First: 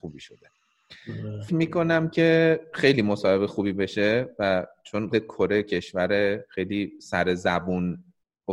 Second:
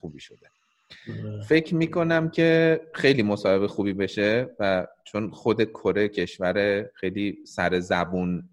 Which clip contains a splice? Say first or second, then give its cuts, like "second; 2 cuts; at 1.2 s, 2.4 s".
first; 2 cuts; at 1.5 s, 5.1 s